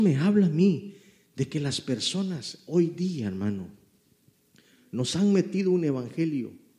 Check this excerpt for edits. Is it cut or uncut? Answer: uncut